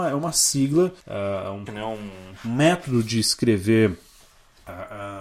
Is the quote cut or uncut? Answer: cut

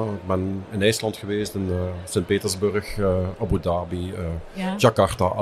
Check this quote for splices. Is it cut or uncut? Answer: uncut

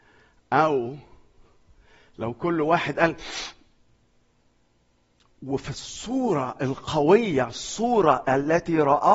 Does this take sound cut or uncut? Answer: uncut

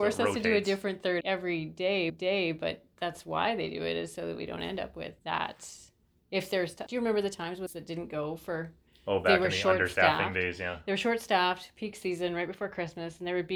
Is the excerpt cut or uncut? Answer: cut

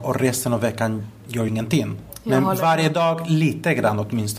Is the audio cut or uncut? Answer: cut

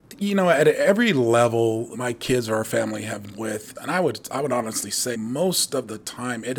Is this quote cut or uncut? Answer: cut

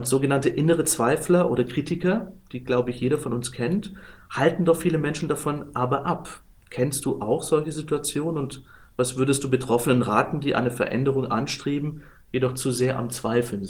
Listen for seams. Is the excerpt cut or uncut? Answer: uncut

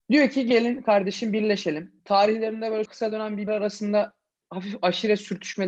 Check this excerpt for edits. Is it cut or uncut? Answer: cut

